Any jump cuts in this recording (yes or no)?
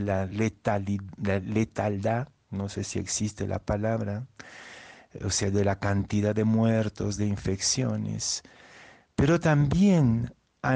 no